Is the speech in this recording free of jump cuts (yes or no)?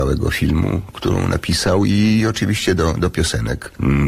yes